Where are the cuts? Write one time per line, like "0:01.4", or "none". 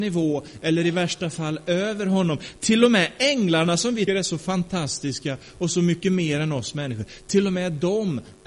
0:04.1